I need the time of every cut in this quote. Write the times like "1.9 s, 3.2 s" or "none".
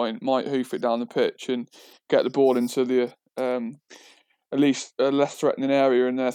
none